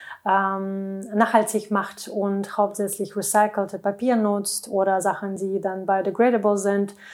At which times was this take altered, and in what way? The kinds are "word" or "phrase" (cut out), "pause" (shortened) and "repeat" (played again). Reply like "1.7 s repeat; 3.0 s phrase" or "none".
none